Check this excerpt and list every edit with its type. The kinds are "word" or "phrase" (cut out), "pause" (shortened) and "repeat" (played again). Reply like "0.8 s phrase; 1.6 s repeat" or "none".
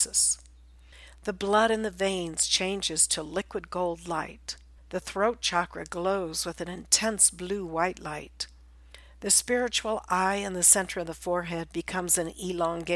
4.8 s pause

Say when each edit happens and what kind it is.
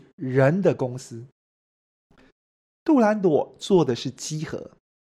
none

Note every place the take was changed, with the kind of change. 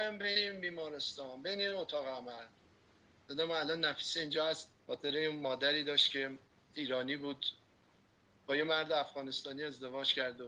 4.8 s pause

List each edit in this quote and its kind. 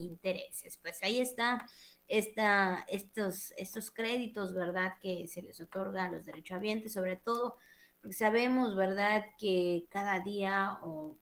none

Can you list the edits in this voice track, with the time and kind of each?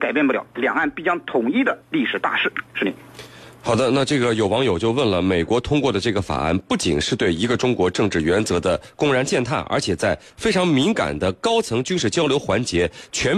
1.8 s pause

